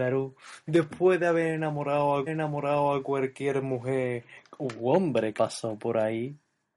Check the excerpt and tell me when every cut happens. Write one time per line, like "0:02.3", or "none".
0:02.3
0:04.5
0:05.3